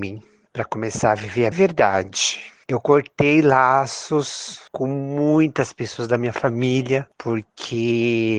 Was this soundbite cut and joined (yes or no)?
yes